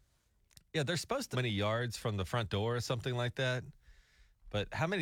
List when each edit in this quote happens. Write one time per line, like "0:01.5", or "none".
0:01.3